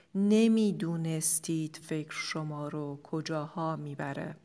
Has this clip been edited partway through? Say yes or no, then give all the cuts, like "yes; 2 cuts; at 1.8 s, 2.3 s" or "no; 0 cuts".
no; 0 cuts